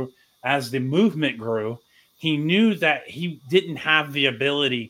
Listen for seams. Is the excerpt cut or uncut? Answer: uncut